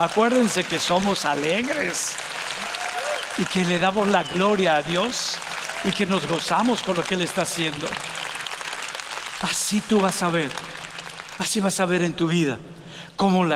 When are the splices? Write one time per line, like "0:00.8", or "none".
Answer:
none